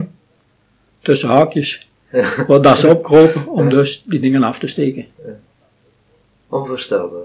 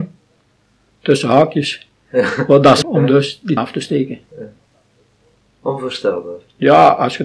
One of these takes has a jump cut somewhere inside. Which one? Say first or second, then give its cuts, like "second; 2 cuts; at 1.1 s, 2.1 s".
second; 2 cuts; at 2.8 s, 3.6 s